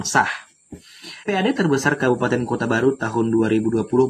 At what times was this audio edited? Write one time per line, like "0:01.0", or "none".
0:01.2